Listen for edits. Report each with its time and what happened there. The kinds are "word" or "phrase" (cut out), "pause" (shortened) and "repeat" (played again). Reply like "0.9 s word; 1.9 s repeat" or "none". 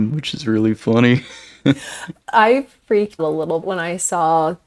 2.2 s word; 3.2 s word; 3.6 s word